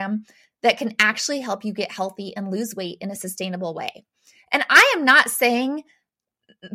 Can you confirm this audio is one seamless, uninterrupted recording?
yes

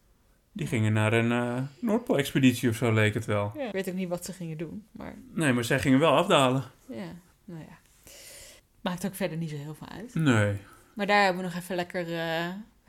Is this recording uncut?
no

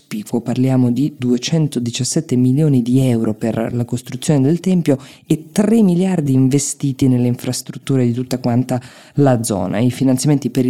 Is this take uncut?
yes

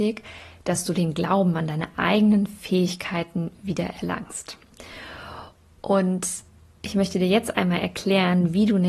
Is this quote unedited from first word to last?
yes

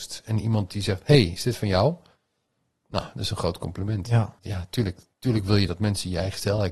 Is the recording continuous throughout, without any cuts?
no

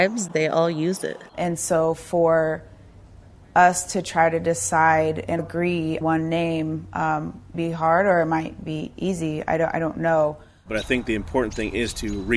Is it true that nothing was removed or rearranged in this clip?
no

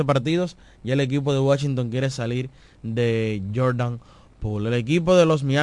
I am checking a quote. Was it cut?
no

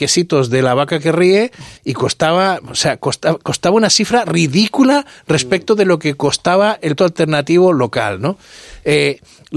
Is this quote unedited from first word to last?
no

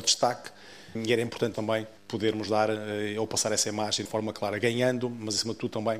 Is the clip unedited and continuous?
no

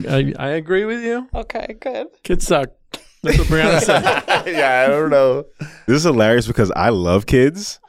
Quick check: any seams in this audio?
no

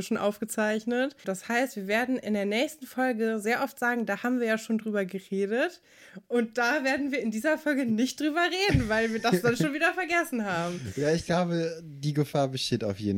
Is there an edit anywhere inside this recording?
yes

